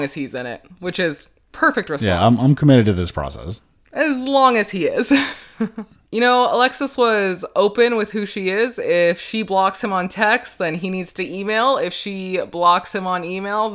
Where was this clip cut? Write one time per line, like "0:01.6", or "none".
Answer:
0:06.1